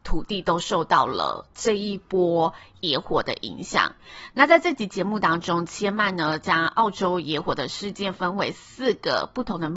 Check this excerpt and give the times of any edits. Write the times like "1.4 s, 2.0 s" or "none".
none